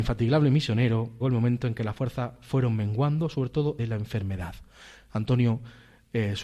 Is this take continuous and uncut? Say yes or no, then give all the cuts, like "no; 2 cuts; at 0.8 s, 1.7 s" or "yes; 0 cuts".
no; 2 cuts; at 1.2 s, 3.8 s